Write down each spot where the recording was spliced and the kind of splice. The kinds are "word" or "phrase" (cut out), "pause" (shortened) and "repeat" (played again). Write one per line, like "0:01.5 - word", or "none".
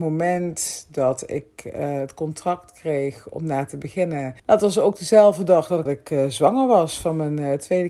0:04.4 - pause
0:05.9 - phrase